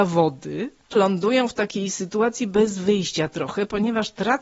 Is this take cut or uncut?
cut